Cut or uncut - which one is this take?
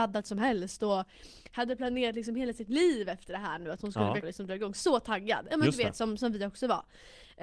cut